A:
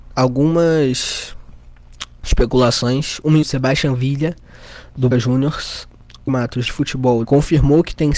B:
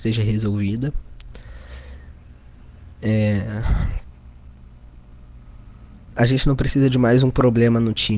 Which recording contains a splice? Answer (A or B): A